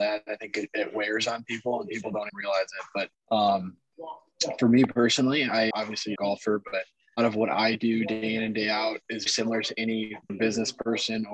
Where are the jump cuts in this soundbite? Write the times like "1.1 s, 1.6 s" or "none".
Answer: 2.3 s, 3.1 s, 5.7 s, 6.2 s, 7.2 s, 9.3 s, 10.3 s